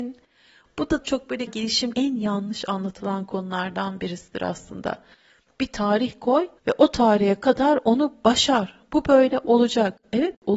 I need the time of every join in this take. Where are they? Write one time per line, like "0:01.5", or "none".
0:01.0
0:01.5
0:01.9
0:06.6